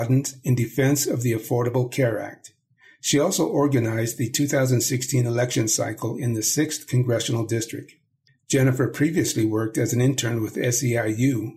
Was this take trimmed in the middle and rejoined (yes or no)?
no